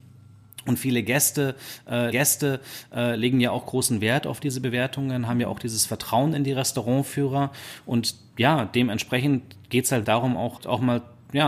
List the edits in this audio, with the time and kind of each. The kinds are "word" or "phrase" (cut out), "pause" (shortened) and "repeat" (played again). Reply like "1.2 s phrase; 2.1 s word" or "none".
2.1 s repeat; 10.0 s word; 10.6 s word